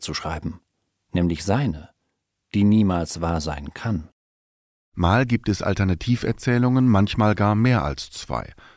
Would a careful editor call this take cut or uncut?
uncut